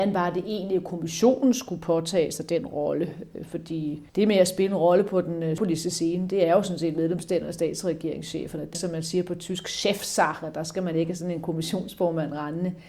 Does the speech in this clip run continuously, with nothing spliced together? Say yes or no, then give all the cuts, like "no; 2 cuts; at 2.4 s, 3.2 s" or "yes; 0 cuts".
no; 3 cuts; at 4.1 s, 5.6 s, 8.7 s